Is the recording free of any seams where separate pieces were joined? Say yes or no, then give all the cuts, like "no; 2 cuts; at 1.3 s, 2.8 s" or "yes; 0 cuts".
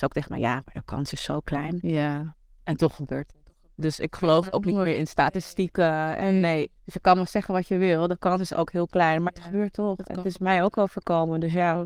no; 2 cuts; at 6.8 s, 9.3 s